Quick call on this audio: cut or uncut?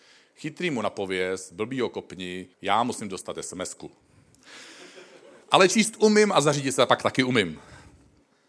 cut